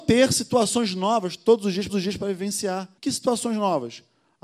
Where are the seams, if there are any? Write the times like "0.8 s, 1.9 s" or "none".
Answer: 1.9 s, 3.0 s